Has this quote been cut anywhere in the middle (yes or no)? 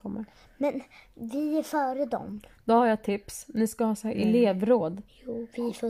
no